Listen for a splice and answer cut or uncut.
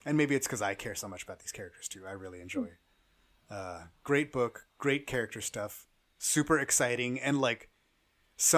uncut